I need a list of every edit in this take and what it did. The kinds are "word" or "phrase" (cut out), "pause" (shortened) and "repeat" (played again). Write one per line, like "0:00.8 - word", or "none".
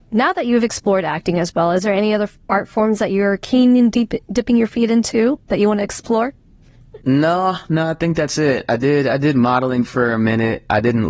0:07.0 - pause